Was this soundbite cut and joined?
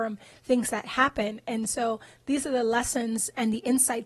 no; 0 cuts

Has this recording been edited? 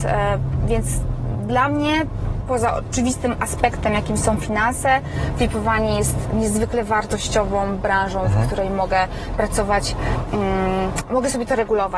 no; 0 cuts

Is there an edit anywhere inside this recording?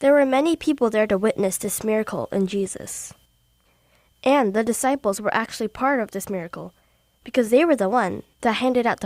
no; 0 cuts

